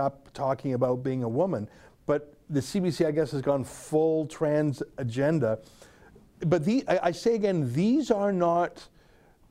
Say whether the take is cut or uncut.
uncut